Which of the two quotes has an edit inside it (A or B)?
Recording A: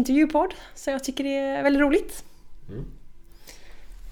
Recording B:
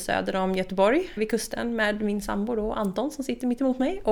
B